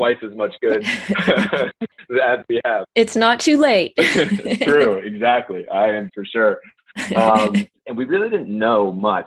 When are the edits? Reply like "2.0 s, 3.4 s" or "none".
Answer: 6.1 s